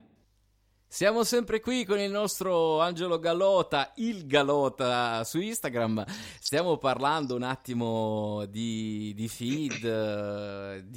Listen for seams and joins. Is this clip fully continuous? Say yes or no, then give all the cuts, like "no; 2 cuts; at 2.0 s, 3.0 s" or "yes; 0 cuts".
yes; 0 cuts